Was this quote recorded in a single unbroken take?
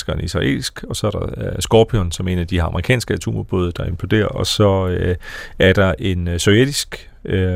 yes; 0 cuts

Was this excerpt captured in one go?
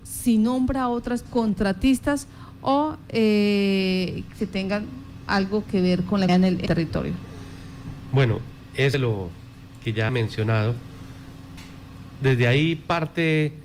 no; 6 cuts; at 1.3 s, 4.4 s, 6.3 s, 6.7 s, 8.9 s, 10.1 s

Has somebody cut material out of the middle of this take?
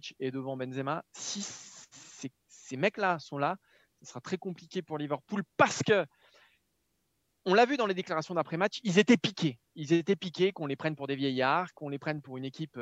no; 0 cuts

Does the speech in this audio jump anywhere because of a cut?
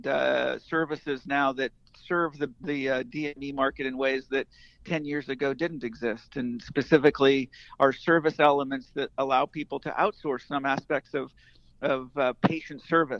no; 0 cuts

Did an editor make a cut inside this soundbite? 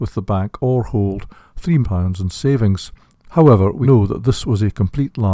yes; 2 cuts; at 1.8 s, 3.8 s

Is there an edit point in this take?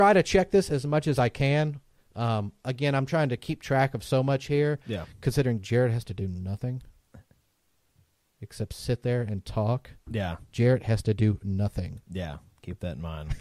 no; 0 cuts

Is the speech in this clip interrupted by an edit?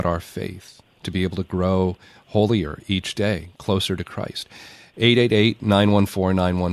no; 0 cuts

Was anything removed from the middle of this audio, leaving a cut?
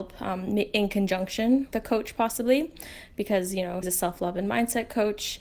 yes; 2 cuts; at 1.7 s, 3.8 s

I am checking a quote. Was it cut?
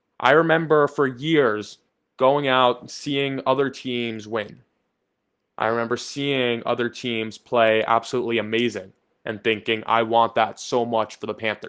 yes; 1 cut; at 1.9 s

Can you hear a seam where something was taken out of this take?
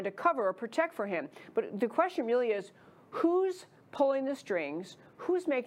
no; 0 cuts

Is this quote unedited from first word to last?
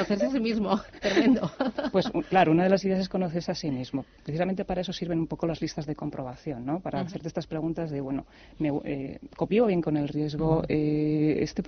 yes; 0 cuts

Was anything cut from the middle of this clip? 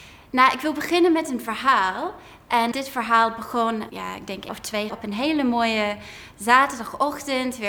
yes; 4 cuts; at 2.7 s, 3.9 s, 4.5 s, 4.9 s

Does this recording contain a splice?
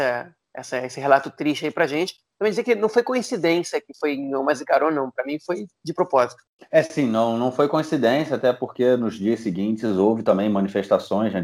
no; 0 cuts

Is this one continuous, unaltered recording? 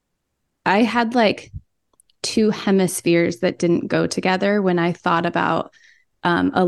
yes; 0 cuts

